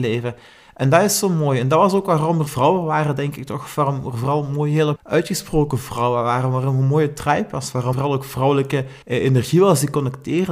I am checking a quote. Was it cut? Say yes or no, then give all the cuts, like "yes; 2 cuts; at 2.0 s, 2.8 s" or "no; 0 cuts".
yes; 4 cuts; at 2.5 s, 5.0 s, 7.9 s, 9.0 s